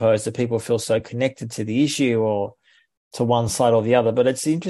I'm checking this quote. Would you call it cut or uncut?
uncut